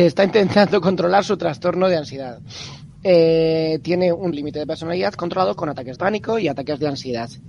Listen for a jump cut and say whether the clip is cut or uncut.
cut